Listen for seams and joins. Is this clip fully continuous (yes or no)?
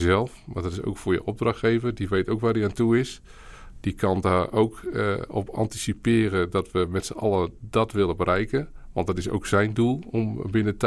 yes